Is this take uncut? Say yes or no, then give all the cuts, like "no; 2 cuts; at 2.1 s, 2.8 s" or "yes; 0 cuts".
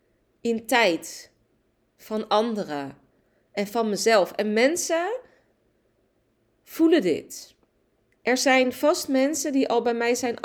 yes; 0 cuts